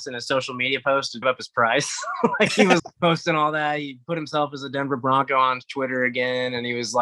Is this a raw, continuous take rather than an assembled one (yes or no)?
no